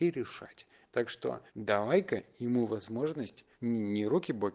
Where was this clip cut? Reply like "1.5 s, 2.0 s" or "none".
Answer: 1.5 s, 3.5 s